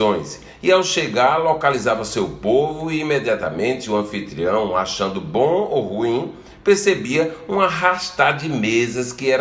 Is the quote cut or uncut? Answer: uncut